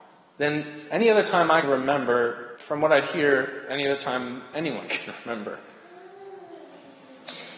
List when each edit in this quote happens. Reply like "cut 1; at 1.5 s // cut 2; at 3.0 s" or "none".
cut 1; at 1.6 s // cut 2; at 2.6 s